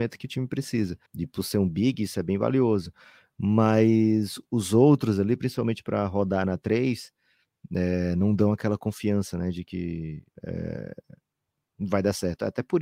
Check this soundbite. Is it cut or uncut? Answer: cut